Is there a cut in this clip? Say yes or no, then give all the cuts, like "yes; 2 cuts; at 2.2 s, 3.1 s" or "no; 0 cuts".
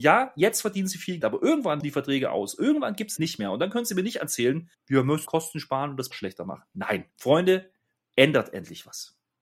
yes; 7 cuts; at 1.2 s, 1.8 s, 3.2 s, 4.7 s, 5.3 s, 6.1 s, 7.1 s